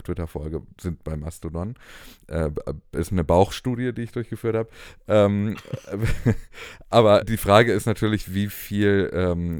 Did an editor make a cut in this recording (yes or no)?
yes